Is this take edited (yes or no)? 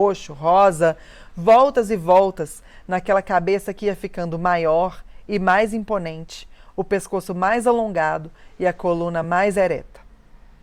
no